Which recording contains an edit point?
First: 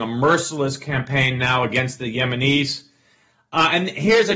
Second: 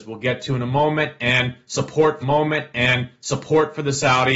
second; 1 cut; at 2.2 s

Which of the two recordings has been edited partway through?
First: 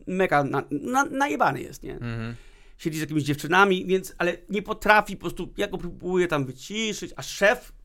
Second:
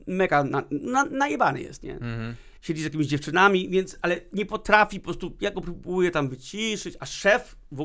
second; 1 cut; at 2.6 s

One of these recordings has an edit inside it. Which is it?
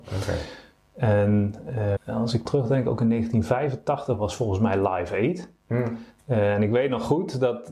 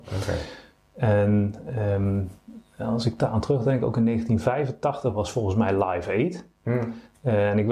first; 2 cuts; at 2.0 s, 2.5 s

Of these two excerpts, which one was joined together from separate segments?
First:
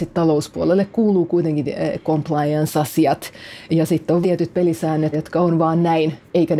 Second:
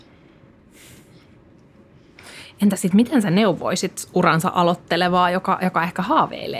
first; 3 cuts; at 3.7 s, 4.2 s, 5.1 s

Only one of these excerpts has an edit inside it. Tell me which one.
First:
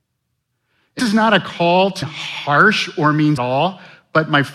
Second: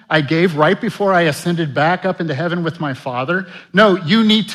first; 3 cuts; at 1.0 s, 2.0 s, 3.4 s

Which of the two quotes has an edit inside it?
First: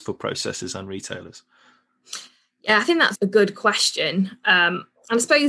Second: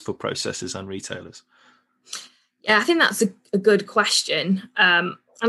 first; 1 cut; at 3.1 s

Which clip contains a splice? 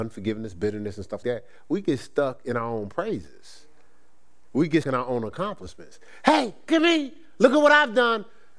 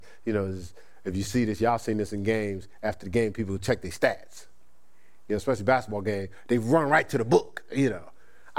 first; 3 cuts; at 1.2 s, 4.8 s, 6.7 s

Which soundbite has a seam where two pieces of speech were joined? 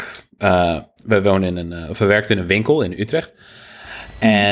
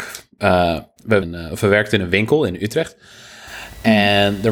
second; 1 cut; at 1.2 s

